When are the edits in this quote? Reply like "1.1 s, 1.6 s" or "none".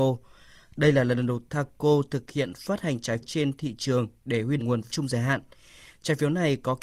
1.5 s, 3.2 s, 4.6 s, 4.9 s